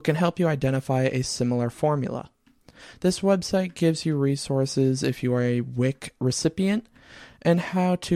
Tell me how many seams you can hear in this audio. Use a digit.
0